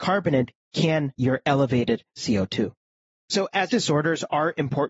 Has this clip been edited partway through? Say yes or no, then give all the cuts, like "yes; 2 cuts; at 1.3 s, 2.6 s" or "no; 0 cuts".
yes; 2 cuts; at 1.1 s, 3.7 s